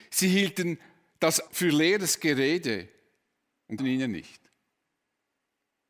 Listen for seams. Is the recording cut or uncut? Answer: cut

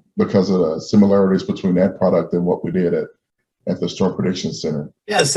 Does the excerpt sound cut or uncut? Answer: uncut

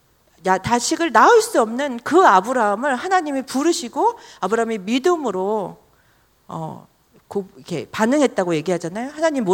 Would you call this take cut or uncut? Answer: uncut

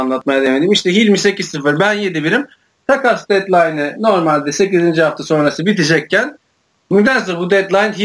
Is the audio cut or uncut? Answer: uncut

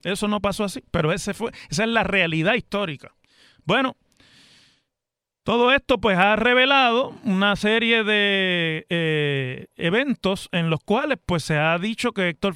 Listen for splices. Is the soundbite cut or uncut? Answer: uncut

